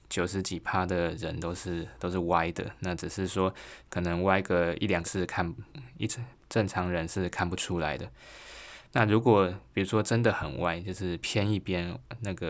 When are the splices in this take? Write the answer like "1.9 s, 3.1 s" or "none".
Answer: 5.0 s, 5.7 s